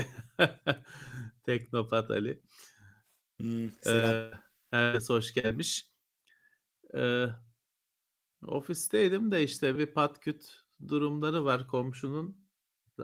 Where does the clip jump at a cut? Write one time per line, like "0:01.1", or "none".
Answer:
0:09.8